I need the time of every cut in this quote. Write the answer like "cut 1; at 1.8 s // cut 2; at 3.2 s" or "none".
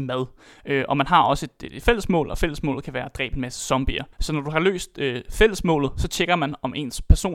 cut 1; at 4.1 s

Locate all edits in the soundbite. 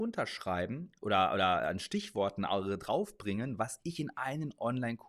cut 1; at 1.0 s

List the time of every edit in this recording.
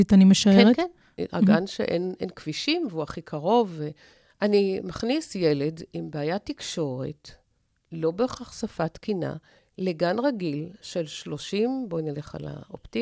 cut 1; at 4.1 s // cut 2; at 9.6 s

